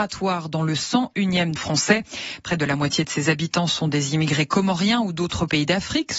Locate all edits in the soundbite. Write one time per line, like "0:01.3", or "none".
0:01.6